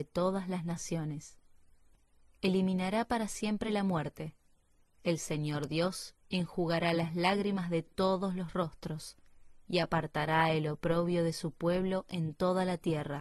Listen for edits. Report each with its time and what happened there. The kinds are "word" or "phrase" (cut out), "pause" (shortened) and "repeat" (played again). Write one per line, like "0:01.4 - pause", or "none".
none